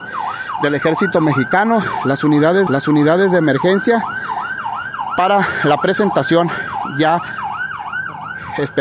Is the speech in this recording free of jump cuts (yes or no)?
no